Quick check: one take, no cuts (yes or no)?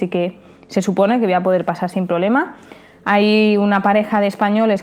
yes